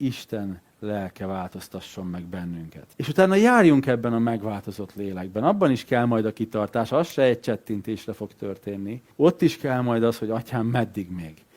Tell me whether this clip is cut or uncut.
cut